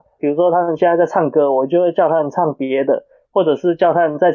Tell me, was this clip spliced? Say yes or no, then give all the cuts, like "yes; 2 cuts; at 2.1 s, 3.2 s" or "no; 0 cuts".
no; 0 cuts